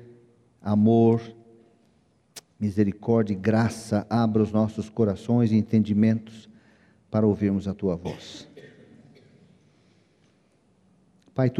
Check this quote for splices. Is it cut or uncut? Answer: uncut